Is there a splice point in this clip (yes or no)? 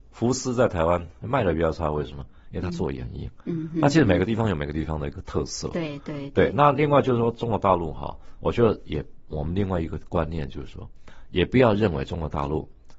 no